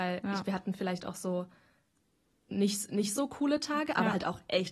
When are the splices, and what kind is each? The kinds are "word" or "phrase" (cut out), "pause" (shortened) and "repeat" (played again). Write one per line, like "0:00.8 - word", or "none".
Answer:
none